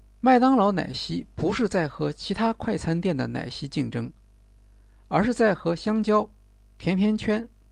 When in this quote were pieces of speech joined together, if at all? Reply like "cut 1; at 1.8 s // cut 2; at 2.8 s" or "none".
none

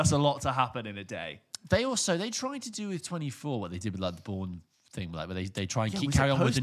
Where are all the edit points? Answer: none

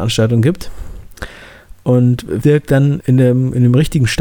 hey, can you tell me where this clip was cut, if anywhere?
cut 1; at 2.4 s // cut 2; at 3.0 s

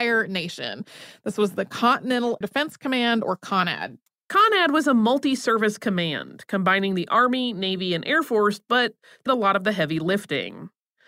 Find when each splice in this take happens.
cut 1; at 2.4 s // cut 2; at 4.1 s // cut 3; at 9.3 s

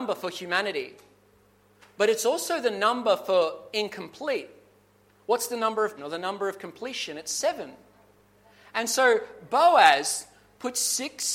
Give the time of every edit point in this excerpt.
cut 1; at 6.0 s

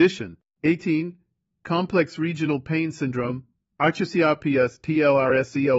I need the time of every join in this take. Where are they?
none

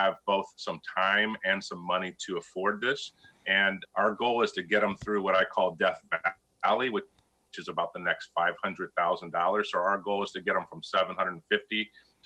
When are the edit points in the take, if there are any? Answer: cut 1; at 3.8 s

